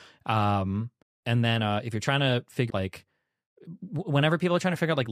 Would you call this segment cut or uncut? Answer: cut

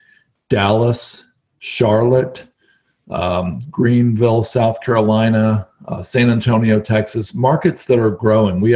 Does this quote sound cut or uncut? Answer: uncut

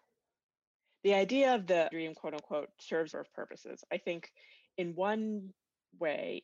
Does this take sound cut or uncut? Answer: cut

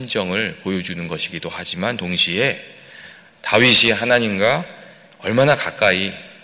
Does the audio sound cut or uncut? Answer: uncut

